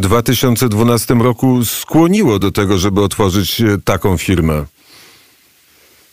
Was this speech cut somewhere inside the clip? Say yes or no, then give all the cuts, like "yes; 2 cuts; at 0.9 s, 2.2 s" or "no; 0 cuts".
no; 0 cuts